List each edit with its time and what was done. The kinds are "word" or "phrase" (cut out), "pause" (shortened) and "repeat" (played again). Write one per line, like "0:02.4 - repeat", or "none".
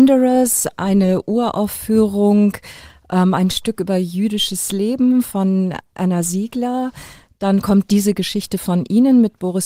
none

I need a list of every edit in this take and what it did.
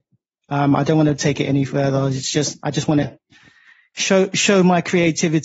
none

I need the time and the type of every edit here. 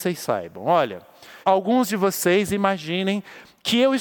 0:01.4 - word

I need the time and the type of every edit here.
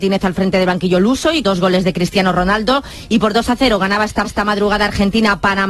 0:01.4 - word
0:04.2 - repeat

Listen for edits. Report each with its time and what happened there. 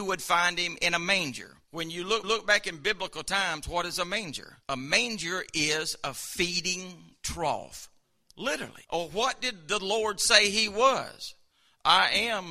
0:01.6 - pause
0:02.2 - repeat
0:04.6 - pause
0:08.8 - pause

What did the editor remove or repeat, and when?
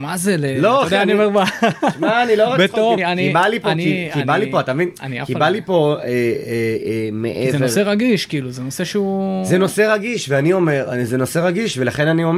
0:03.0 - word

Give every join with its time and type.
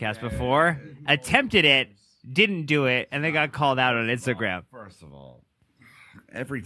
none

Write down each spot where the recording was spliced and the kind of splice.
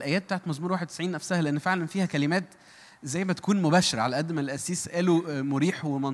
none

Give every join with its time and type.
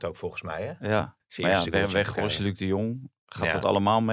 none

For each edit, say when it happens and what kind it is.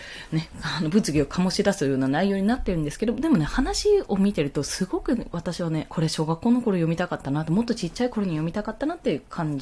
0:05.9 - word

